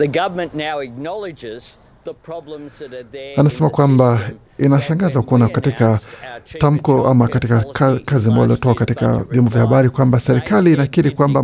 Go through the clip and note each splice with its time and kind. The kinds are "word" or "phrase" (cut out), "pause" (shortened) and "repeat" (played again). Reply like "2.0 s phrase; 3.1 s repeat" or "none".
none